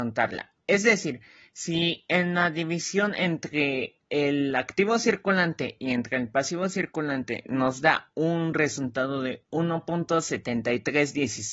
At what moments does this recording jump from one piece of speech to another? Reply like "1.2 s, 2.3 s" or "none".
4.0 s